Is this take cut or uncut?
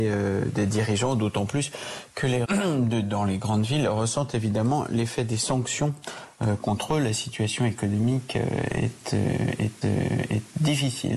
cut